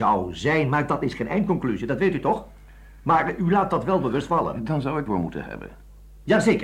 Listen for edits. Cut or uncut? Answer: cut